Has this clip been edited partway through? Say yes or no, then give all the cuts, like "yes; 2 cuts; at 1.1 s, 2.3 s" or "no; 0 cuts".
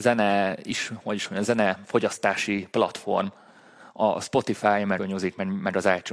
yes; 1 cut; at 5.0 s